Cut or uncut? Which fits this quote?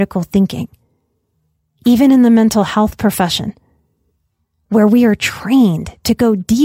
uncut